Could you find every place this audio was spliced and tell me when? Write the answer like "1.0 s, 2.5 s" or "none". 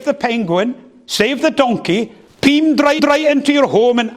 2.3 s, 3.0 s